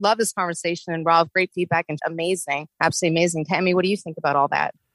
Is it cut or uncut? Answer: cut